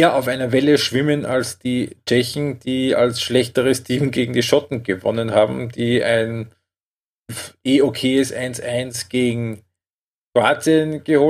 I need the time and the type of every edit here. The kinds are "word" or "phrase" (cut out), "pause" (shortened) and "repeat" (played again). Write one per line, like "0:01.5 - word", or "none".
none